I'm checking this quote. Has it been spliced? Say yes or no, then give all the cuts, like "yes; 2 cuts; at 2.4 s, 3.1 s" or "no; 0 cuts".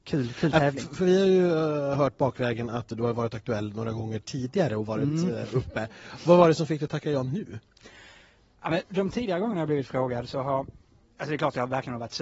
no; 0 cuts